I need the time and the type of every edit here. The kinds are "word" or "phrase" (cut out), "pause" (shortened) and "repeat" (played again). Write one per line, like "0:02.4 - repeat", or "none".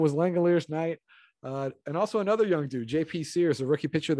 none

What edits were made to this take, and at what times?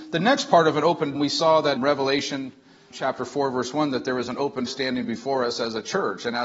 0:01.1 - word
0:01.8 - word
0:02.9 - word
0:04.7 - word

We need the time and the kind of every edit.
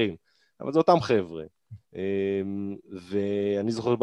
0:01.8 - pause

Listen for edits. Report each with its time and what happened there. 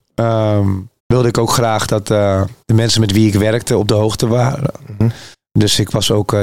0:01.0 - pause
0:02.6 - pause
0:05.3 - pause

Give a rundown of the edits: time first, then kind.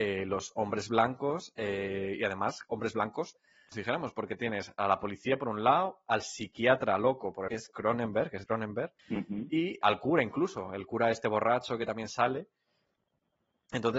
0:03.7 - phrase
0:07.5 - phrase
0:08.4 - word
0:09.0 - pause
0:09.8 - word

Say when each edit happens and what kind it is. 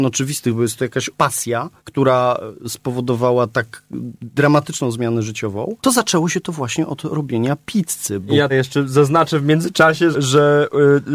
0:01.2 - word
0:01.8 - pause
0:05.8 - pause
0:08.5 - word
0:10.1 - word

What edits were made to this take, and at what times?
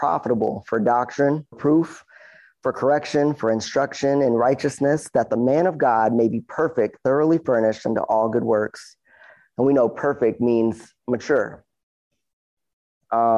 0:01.5 - word

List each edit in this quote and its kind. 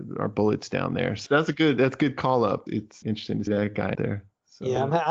0:03.0 - word
0:03.5 - word
0:03.9 - word

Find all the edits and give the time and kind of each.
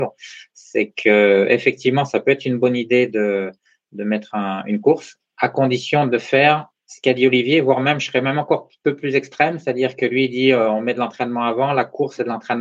none

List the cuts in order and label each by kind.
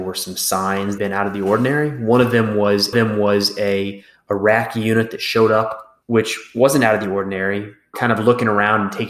0:01.0 - phrase
0:02.9 - repeat
0:06.0 - pause
0:07.9 - phrase

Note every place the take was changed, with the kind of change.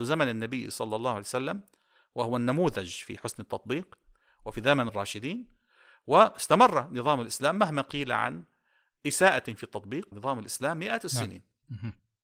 0:04.9 - phrase
0:10.1 - word

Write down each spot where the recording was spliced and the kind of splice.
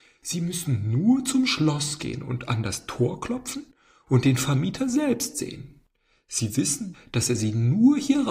none

